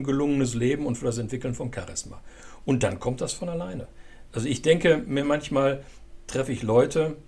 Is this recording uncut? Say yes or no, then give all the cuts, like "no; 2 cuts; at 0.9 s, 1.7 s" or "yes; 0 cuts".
yes; 0 cuts